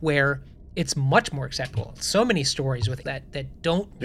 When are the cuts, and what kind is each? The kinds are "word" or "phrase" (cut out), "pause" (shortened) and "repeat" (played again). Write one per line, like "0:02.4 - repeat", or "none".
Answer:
0:03.0 - word